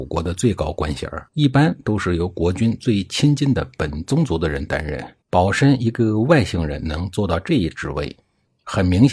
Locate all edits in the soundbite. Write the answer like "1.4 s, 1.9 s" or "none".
1.3 s, 5.2 s